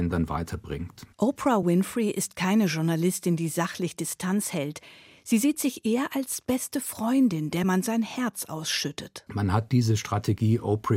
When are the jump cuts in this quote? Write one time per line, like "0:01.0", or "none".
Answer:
none